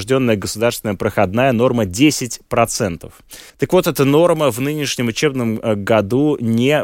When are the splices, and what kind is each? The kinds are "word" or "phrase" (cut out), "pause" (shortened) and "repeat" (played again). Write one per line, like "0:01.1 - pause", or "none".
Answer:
0:03.5 - pause